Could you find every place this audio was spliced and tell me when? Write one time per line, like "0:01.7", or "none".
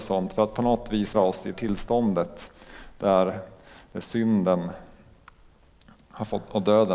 0:01.1
0:01.5